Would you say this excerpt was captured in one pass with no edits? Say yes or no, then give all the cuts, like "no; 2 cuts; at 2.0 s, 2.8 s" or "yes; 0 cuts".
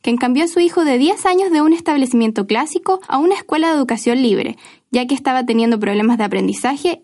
no; 1 cut; at 3.0 s